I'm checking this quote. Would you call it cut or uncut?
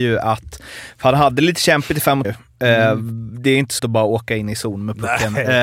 cut